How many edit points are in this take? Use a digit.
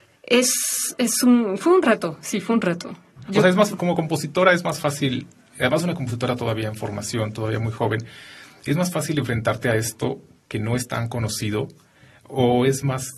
0